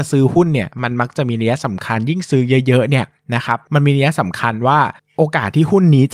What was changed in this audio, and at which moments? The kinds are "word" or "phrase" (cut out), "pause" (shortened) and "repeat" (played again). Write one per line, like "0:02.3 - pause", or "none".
0:05.0 - pause